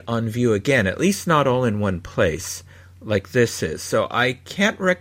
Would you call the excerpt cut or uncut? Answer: uncut